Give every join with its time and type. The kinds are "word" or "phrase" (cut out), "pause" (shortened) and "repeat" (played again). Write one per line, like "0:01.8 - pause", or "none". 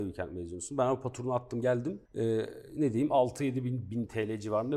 0:02.1 - pause